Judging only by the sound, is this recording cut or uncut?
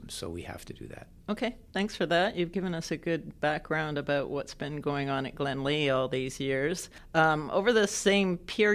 uncut